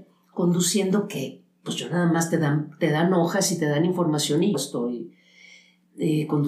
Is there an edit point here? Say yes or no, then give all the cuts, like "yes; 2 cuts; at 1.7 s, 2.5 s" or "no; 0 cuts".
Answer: yes; 1 cut; at 4.5 s